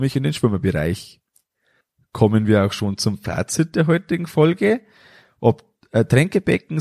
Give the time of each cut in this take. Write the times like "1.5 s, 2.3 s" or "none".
none